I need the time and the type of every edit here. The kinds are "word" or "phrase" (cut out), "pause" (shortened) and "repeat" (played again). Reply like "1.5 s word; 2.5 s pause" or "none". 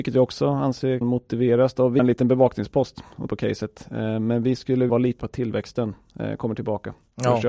1.0 s word; 2.0 s word; 3.3 s word; 4.9 s word; 5.2 s word